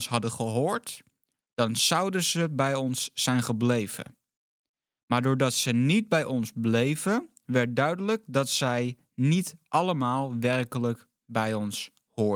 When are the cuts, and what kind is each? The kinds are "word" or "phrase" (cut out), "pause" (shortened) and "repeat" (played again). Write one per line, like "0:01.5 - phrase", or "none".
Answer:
none